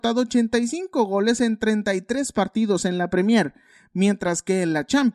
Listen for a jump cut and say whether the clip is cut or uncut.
uncut